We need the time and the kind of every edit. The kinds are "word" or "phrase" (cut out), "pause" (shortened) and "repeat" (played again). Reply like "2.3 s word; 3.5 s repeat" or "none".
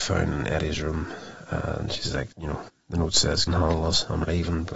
2.3 s pause; 2.7 s pause; 3.5 s word